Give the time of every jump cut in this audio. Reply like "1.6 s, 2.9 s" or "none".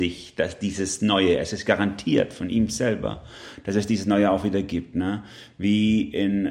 none